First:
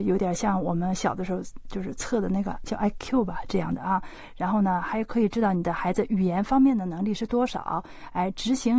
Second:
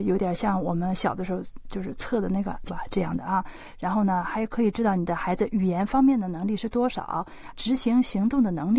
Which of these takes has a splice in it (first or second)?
second